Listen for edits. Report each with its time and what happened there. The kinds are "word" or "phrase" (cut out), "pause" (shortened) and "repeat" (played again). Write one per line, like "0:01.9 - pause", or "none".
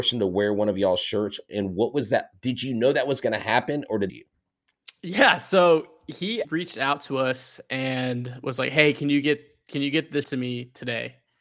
0:04.1 - phrase
0:06.4 - word
0:10.2 - word